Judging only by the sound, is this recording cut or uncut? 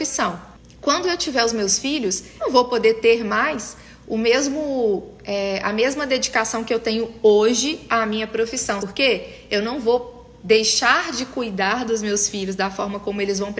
cut